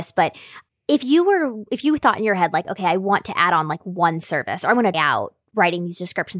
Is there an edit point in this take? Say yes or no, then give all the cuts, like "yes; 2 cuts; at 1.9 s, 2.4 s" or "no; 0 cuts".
yes; 1 cut; at 4.9 s